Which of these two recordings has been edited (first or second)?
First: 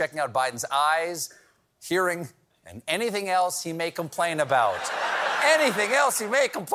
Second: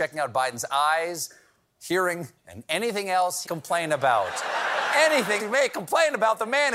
second